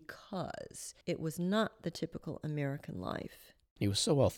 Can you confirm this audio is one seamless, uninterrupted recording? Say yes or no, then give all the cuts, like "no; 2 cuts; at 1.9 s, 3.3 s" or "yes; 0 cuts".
no; 1 cut; at 1.0 s